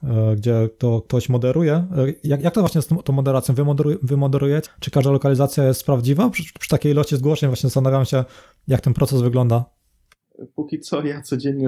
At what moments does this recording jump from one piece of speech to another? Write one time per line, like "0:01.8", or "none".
0:04.7